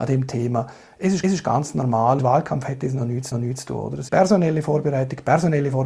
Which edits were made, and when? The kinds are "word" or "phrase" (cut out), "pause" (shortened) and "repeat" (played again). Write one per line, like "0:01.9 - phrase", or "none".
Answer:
0:01.2 - repeat
0:02.2 - phrase
0:03.3 - repeat
0:04.1 - word